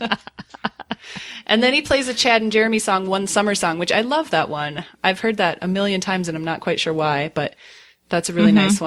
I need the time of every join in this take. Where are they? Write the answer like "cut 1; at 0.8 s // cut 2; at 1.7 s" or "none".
none